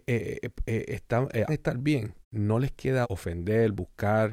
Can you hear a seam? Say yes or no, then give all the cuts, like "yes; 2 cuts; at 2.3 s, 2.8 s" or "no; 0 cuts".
yes; 3 cuts; at 1.5 s, 2.2 s, 3.0 s